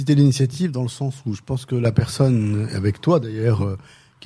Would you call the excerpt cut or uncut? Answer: uncut